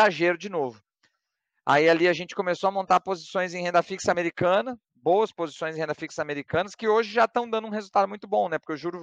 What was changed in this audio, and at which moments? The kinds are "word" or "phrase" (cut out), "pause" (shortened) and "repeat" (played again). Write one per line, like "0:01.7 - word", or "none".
0:04.8 - pause